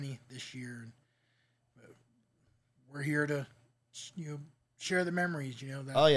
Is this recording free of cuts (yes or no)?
yes